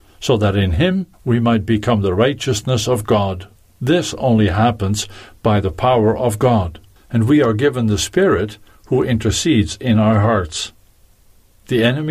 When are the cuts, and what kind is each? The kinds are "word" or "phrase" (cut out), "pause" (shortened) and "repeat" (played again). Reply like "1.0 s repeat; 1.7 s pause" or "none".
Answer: 1.1 s pause; 3.6 s pause; 7.0 s pause